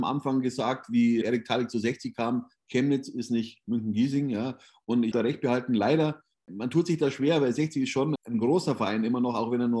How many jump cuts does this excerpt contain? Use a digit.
3